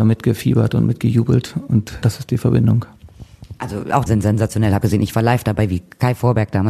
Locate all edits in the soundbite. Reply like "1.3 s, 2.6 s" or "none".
2.0 s, 4.1 s, 4.8 s

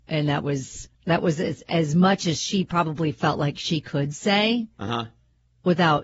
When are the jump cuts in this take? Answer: 0.9 s

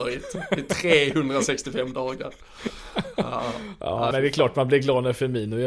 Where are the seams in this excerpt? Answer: 4.1 s

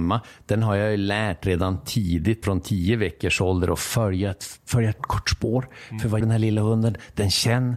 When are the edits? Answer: 2.4 s, 5.0 s, 6.2 s

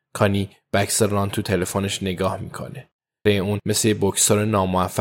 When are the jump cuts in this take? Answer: 3.3 s

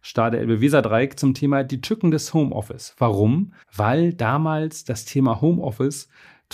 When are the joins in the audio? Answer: 3.6 s

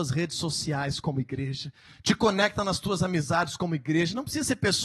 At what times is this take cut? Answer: none

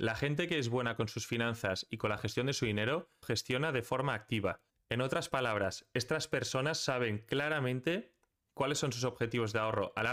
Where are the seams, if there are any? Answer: 3.2 s, 4.7 s

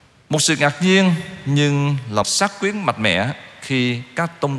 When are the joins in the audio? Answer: 2.2 s

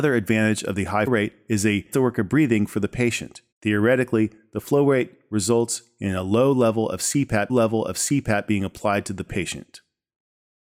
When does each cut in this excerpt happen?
1.1 s, 1.9 s, 3.5 s, 7.5 s

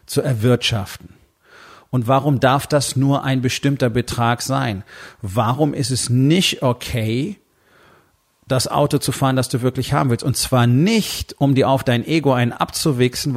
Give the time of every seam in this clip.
none

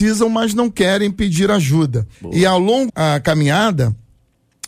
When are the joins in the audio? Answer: 2.1 s, 2.9 s

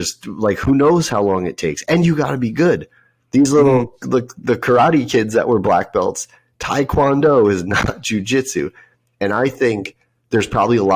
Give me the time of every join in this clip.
none

